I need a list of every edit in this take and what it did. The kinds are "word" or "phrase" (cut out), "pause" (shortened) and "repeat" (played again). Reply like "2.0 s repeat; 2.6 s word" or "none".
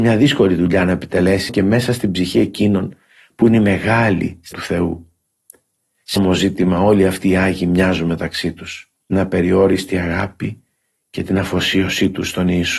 1.5 s word; 4.5 s word; 6.2 s word; 9.1 s word